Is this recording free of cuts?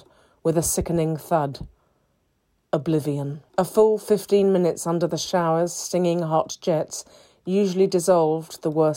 no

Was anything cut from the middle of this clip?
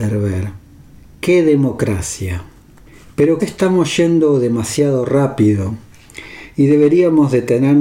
yes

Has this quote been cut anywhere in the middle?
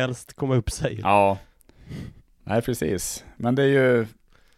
yes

